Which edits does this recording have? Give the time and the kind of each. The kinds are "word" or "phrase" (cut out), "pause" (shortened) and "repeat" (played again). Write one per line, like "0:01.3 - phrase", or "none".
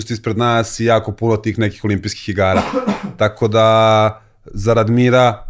none